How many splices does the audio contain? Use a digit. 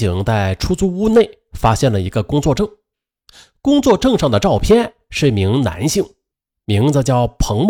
0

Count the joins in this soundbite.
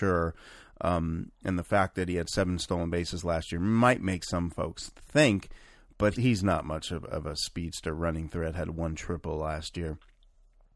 1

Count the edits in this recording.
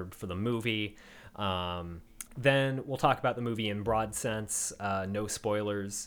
1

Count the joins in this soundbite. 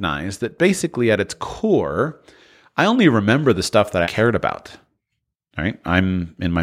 1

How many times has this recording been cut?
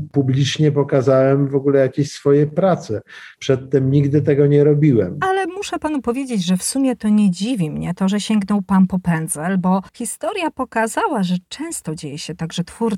1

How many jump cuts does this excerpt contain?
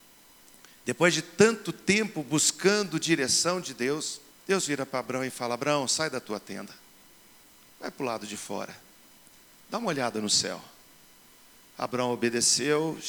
1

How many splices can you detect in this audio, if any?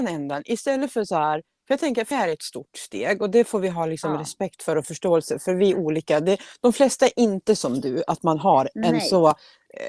1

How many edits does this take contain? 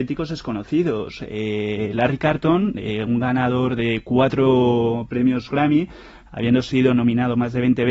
0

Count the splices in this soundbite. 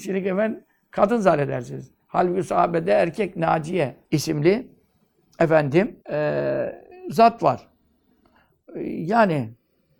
2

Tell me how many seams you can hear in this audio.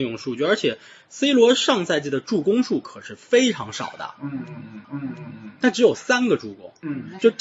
1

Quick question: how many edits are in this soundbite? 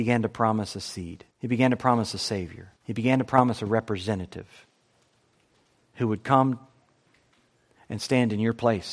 2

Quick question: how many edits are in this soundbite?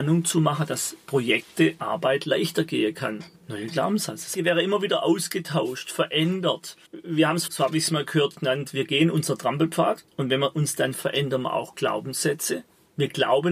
6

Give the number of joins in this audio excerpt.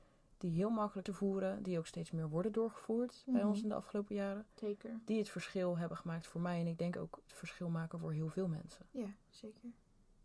1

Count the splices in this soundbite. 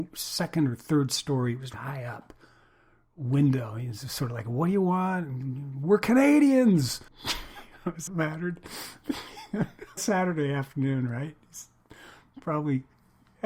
4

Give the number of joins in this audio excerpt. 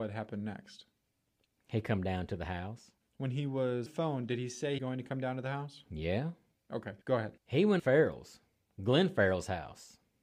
6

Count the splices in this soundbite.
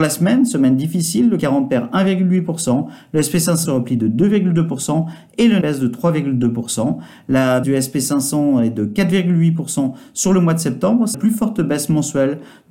5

